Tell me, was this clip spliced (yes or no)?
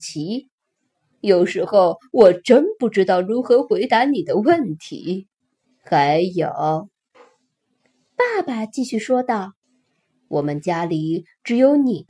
yes